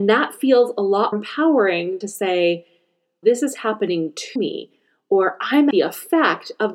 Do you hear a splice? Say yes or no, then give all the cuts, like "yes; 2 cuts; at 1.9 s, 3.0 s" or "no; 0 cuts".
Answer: yes; 5 cuts; at 1.1 s, 2.0 s, 3.2 s, 4.4 s, 5.7 s